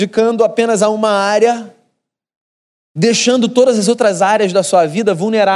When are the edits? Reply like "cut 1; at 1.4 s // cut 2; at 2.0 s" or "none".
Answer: none